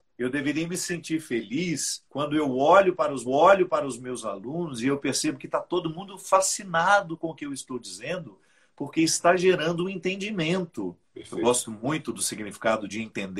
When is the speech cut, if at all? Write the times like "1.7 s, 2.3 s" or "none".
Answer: 2.1 s, 3.3 s, 11.0 s